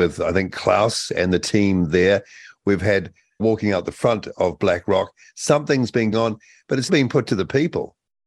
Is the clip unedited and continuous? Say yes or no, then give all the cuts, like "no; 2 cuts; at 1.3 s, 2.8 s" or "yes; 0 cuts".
no; 3 cuts; at 3.4 s, 6.1 s, 6.9 s